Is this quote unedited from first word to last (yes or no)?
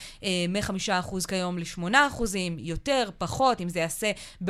yes